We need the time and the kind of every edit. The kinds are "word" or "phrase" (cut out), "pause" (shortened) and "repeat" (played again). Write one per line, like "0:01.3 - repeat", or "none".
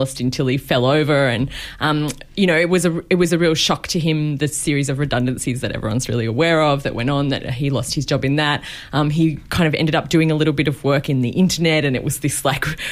none